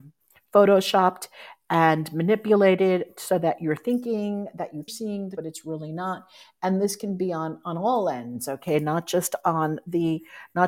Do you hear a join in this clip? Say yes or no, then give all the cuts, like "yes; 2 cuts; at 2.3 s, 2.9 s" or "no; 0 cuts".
yes; 2 cuts; at 4.9 s, 5.4 s